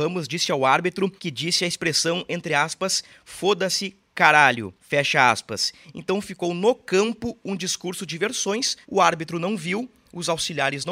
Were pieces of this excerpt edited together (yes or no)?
yes